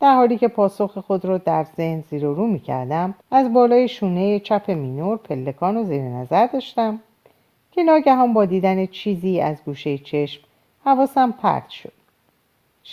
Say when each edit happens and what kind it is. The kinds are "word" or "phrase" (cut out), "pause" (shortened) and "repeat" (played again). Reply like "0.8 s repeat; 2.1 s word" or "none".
3.2 s pause